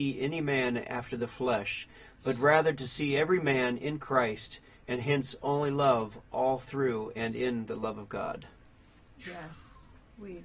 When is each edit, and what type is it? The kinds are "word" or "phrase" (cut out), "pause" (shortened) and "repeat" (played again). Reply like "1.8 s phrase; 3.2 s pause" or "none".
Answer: none